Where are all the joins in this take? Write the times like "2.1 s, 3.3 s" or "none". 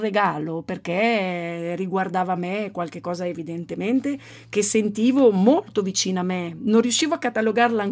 none